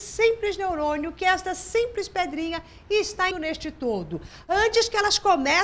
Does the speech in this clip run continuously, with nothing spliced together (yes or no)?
no